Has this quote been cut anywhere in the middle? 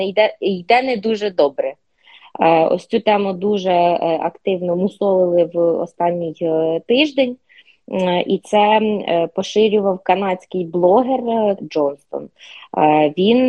yes; 1 cut; at 11.6 s

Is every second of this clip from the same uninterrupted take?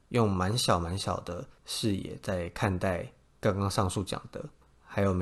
no; 1 cut; at 1.6 s

